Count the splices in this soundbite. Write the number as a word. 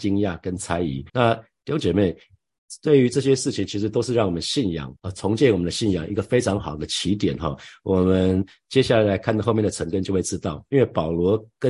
two